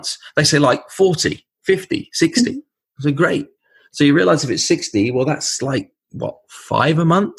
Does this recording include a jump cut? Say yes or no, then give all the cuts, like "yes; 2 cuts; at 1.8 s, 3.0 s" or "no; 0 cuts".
no; 0 cuts